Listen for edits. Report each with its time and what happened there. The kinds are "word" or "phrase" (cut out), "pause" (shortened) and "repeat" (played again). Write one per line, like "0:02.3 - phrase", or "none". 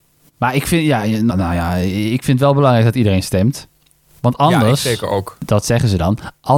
0:01.3 - phrase